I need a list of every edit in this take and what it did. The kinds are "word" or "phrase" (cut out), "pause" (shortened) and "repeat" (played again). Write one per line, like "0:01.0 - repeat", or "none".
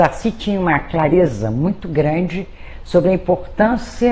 none